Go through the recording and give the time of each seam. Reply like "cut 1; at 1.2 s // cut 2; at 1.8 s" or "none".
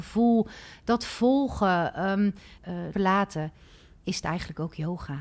cut 1; at 2.6 s // cut 2; at 2.9 s